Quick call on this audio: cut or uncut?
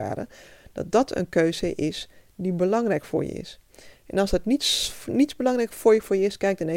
uncut